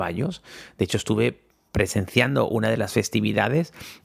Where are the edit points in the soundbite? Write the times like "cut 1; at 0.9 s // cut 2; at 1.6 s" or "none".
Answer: none